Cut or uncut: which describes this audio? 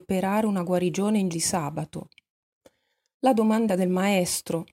cut